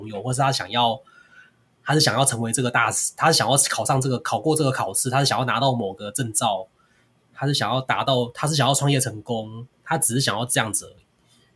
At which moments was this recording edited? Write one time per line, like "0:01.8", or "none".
0:09.7